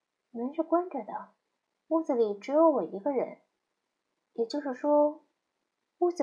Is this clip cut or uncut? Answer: uncut